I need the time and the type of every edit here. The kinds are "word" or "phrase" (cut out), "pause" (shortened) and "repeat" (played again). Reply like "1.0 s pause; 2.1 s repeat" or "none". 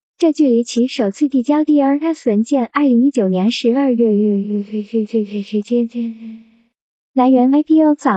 none